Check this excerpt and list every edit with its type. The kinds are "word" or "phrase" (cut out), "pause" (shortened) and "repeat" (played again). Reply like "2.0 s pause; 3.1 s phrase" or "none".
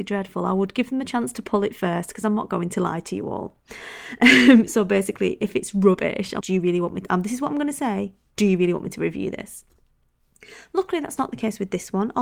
6.4 s word

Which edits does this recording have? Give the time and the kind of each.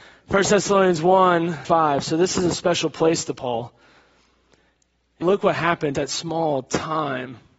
1.6 s word; 5.2 s word; 5.9 s word

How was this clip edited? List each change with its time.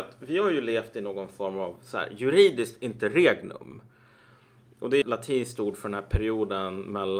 5.0 s phrase

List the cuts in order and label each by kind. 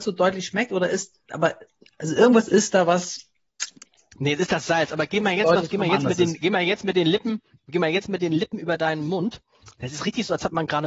none

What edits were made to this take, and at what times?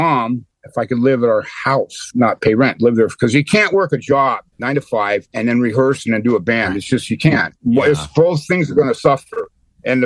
2.1 s word; 4.5 s pause

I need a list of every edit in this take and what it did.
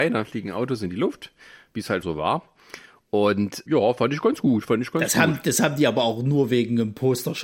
2.0 s word; 3.7 s word

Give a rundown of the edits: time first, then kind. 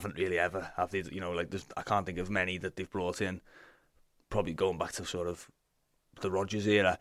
none

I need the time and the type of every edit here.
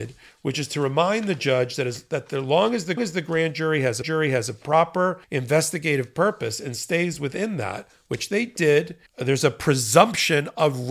3.0 s repeat; 4.0 s repeat; 5.2 s pause; 9.1 s pause

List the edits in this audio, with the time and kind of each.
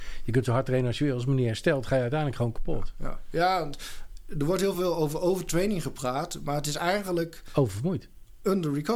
none

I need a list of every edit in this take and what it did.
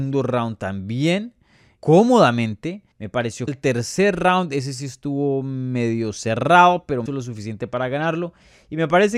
1.8 s word; 2.9 s pause; 3.5 s phrase; 7.1 s phrase

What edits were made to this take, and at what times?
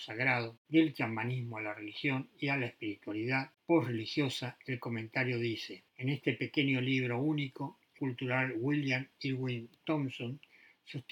3.5 s pause; 5.9 s pause; 8.0 s word

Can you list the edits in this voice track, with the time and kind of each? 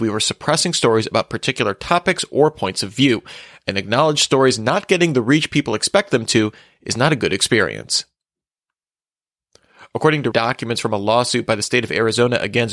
10.3 s phrase

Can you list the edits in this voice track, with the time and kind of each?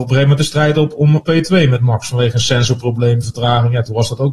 1.2 s word; 3.2 s phrase

